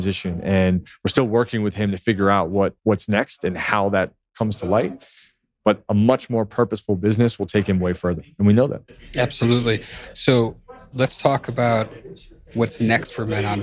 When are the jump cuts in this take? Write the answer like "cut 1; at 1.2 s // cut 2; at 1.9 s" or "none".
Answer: cut 1; at 2.8 s